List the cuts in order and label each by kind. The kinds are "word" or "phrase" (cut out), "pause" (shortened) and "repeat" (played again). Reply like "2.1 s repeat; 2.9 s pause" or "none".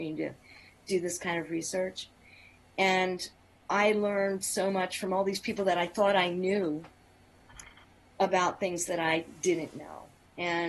none